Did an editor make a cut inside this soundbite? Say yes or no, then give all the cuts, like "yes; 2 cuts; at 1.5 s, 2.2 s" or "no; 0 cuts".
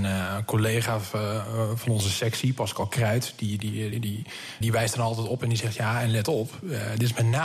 yes; 2 cuts; at 3.9 s, 4.6 s